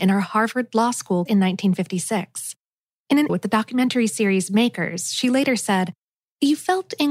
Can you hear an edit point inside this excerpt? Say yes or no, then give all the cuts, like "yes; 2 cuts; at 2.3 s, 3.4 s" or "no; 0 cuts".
yes; 2 cuts; at 1.3 s, 3.3 s